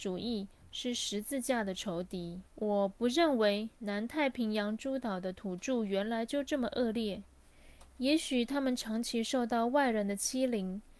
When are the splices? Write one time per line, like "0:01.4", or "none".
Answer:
0:02.5